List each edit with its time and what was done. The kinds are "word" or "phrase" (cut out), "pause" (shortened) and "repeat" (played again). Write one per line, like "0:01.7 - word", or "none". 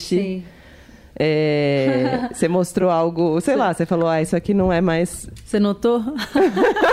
none